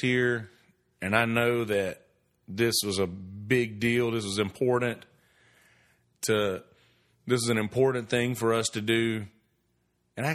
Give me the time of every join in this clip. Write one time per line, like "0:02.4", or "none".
none